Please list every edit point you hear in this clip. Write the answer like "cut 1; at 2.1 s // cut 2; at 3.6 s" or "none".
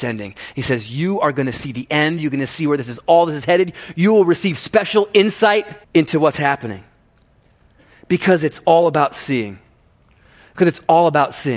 cut 1; at 5.8 s